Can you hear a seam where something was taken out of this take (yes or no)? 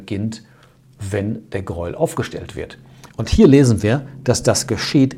no